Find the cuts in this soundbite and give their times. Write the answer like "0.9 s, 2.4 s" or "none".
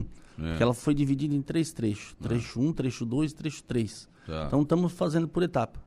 none

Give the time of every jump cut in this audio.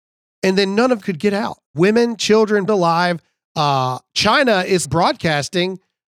1.0 s, 1.6 s, 2.7 s, 4.8 s

